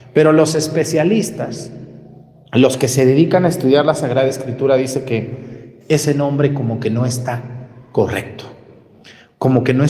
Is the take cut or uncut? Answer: uncut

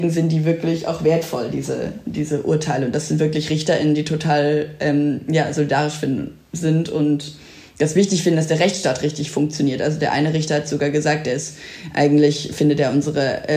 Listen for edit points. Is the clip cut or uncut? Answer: uncut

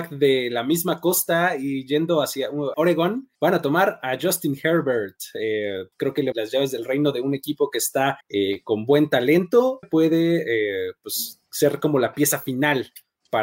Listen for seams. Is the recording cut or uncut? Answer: cut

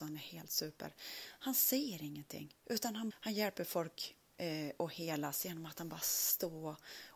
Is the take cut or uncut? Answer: cut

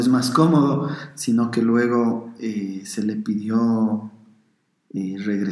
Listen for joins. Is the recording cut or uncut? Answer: uncut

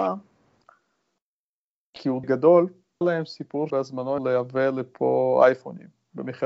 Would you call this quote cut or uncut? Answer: cut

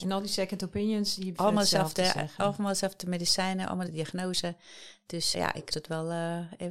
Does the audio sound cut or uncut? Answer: cut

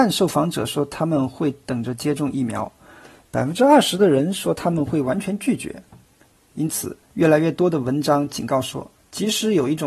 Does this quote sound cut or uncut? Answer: cut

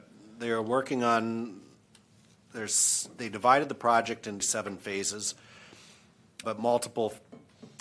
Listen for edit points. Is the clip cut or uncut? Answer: cut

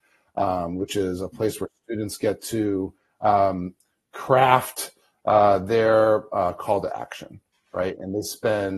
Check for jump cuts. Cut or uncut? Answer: uncut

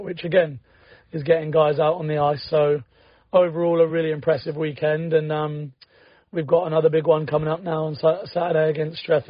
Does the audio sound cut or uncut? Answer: uncut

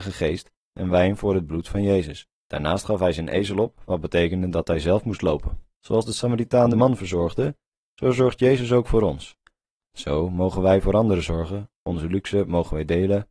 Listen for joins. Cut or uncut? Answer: cut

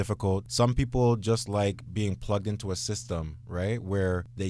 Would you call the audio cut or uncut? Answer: uncut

